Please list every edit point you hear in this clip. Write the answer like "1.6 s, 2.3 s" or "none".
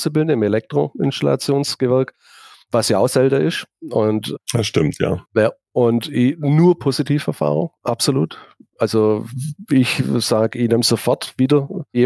none